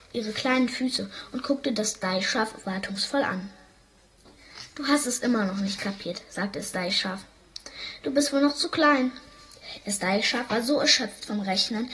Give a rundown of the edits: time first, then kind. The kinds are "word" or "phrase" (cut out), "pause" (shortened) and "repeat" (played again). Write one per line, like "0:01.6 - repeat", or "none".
none